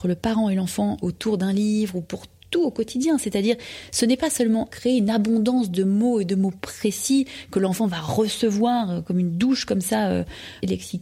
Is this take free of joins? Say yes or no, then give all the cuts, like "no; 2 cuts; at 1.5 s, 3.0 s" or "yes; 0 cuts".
yes; 0 cuts